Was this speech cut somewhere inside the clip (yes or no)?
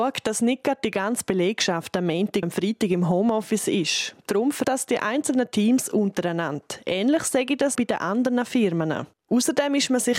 yes